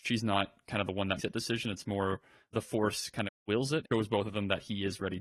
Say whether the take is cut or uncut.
cut